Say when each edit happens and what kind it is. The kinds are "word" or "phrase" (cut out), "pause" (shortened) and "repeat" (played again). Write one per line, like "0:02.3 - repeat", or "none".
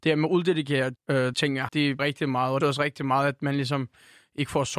0:01.0 - word
0:01.3 - word
0:01.7 - word
0:02.0 - word
0:02.6 - word